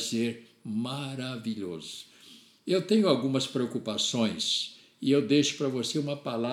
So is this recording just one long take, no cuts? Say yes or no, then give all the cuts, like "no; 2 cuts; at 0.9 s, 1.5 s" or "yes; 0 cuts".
yes; 0 cuts